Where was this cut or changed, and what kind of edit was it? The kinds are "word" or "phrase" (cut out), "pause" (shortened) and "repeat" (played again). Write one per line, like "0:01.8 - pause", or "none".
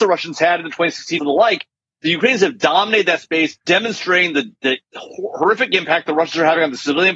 0:01.2 - word
0:03.6 - pause